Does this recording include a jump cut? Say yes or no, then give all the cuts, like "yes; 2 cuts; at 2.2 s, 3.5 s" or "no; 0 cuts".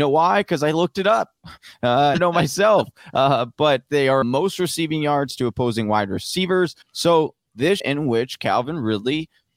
yes; 4 cuts; at 2.1 s, 4.2 s, 6.8 s, 7.8 s